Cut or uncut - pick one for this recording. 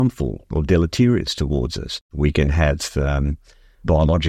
cut